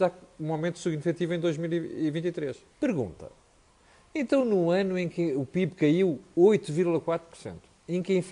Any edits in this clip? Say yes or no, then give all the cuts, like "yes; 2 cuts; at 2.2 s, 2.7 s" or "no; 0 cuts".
yes; 1 cut; at 2.7 s